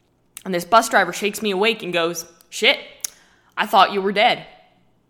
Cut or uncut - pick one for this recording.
uncut